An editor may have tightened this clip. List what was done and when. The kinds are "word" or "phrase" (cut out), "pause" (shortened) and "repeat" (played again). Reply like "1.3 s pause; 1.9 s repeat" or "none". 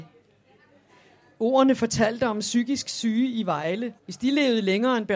4.0 s pause